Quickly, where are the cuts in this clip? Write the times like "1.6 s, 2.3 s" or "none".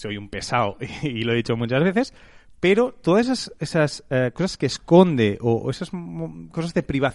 none